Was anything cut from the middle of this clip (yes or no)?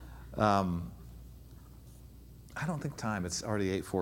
yes